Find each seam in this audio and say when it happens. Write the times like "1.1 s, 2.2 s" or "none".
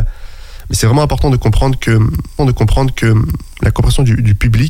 2.4 s